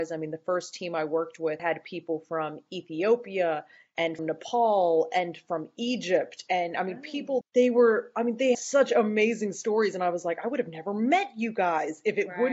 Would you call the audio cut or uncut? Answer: cut